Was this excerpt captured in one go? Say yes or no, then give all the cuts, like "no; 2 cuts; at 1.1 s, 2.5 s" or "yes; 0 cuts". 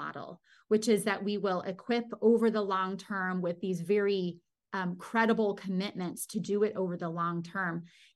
yes; 0 cuts